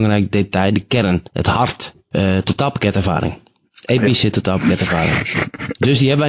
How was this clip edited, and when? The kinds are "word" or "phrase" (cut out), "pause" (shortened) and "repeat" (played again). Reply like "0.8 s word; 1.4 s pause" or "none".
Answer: 1.3 s pause; 2.1 s phrase